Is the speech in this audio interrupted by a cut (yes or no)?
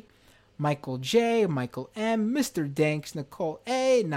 no